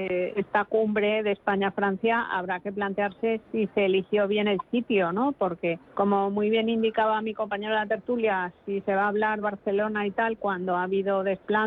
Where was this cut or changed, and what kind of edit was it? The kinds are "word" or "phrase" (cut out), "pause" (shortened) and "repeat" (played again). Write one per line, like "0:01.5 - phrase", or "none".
0:05.8 - pause
0:09.4 - phrase